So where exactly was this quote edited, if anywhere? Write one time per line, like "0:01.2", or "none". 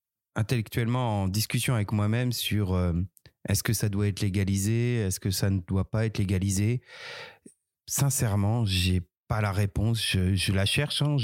none